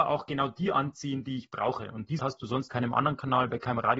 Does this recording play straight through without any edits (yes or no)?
no